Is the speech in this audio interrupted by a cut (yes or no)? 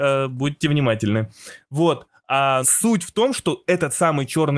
yes